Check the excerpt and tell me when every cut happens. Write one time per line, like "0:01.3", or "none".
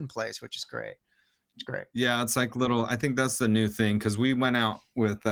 none